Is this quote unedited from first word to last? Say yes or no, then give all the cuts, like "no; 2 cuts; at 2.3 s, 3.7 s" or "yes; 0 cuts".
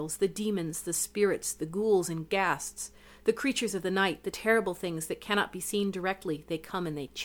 yes; 0 cuts